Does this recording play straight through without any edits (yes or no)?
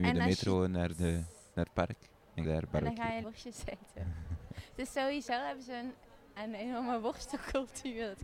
no